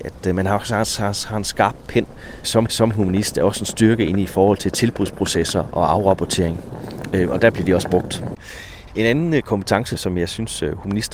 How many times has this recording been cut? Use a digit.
1